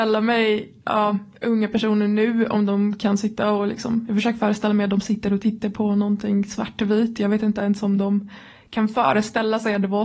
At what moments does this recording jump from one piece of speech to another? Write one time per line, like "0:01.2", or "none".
none